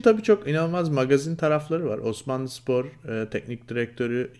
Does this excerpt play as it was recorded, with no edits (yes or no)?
yes